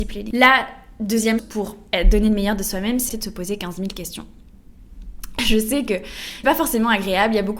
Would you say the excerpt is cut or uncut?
cut